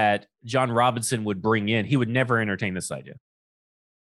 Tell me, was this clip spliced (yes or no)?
no